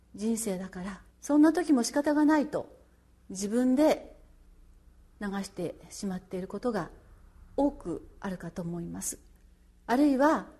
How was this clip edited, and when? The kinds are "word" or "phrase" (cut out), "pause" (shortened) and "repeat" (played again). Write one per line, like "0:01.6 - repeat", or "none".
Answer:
0:01.1 - pause